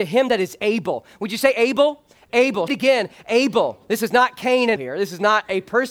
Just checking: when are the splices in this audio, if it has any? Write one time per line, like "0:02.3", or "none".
0:02.7
0:04.8